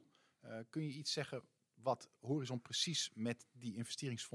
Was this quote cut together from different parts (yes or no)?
no